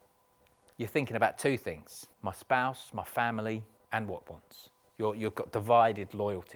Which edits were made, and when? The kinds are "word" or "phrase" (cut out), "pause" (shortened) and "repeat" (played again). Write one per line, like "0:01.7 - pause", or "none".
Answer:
0:02.1 - pause
0:03.8 - pause
0:04.2 - word